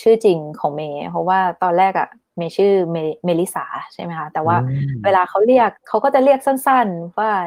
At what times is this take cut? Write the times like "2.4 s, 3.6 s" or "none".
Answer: 5.8 s